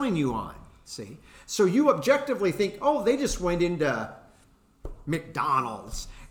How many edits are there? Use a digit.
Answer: 0